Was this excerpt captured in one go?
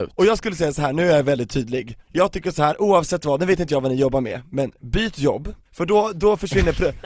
no; 2 cuts; at 2.0 s, 5.6 s

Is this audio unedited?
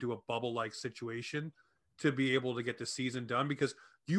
yes; 0 cuts

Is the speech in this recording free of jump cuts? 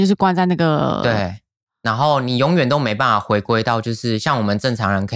yes; 0 cuts

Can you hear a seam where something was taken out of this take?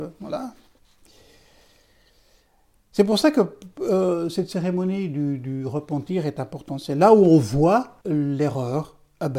yes; 1 cut; at 8.0 s

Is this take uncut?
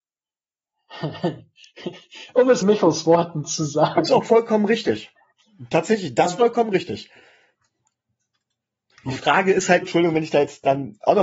no; 3 cuts; at 2.6 s, 6.3 s, 9.8 s

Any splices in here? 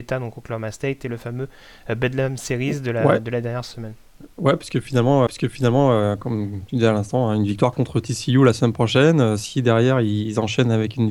yes; 1 cut; at 5.3 s

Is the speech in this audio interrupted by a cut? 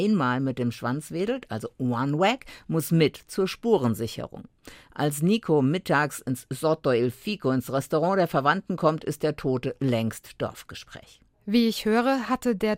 no; 0 cuts

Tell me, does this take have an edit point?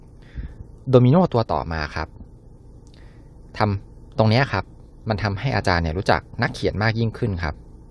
no; 0 cuts

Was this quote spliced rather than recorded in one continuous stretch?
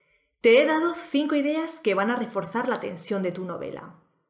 no; 0 cuts

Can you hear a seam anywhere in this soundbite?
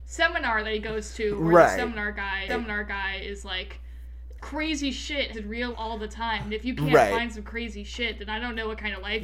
yes; 4 cuts; at 2.5 s, 4.4 s, 5.3 s, 5.7 s

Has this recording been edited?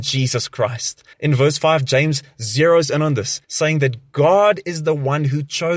yes; 2 cuts; at 1.1 s, 3.4 s

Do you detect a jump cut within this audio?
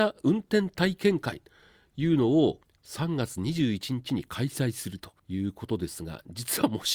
yes; 2 cuts; at 2.6 s, 5.2 s

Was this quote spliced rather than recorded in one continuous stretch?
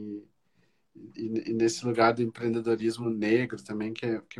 no; 0 cuts

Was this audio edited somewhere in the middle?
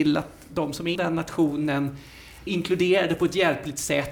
yes; 2 cuts; at 0.9 s, 2.5 s

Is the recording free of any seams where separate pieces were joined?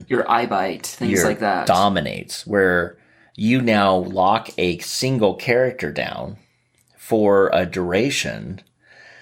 yes; 0 cuts

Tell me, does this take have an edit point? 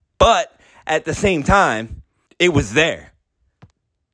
yes; 1 cut; at 2.3 s

